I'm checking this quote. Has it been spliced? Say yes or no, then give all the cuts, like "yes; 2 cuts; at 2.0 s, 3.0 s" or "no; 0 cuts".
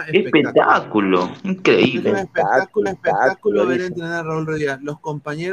yes; 1 cut; at 2.9 s